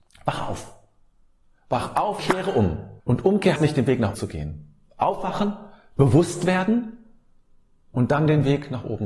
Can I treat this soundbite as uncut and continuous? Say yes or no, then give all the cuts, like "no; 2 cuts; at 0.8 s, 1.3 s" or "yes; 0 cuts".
no; 4 cuts; at 2.2 s, 3.0 s, 3.6 s, 4.1 s